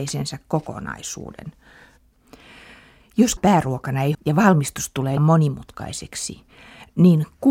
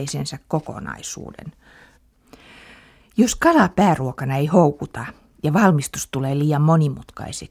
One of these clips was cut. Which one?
first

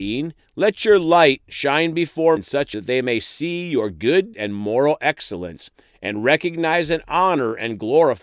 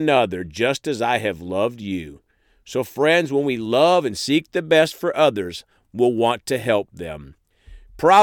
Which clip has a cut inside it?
first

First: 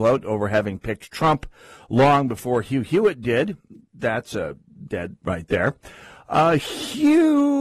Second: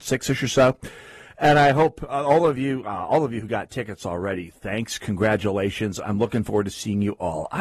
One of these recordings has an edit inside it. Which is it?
first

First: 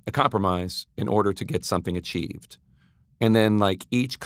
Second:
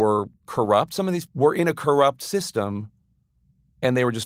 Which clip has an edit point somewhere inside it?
second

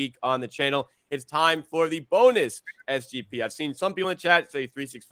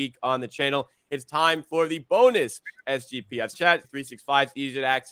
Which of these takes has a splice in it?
second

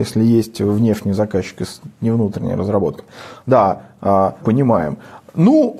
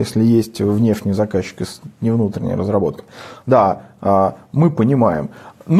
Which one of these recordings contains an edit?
first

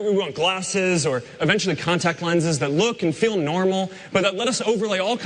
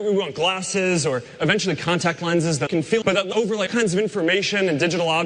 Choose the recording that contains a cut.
second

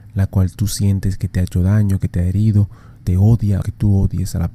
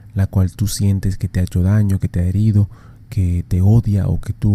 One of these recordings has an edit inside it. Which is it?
first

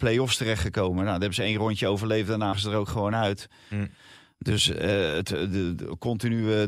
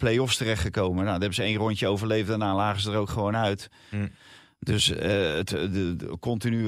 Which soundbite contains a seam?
first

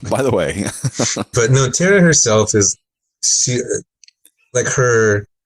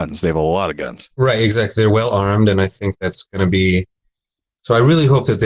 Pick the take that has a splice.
first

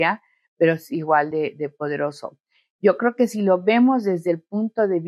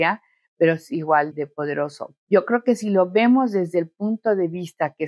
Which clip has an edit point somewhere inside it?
second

